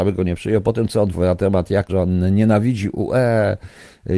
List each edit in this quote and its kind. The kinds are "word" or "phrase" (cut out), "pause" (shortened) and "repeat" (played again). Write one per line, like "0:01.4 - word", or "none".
0:01.1 - phrase
0:01.9 - word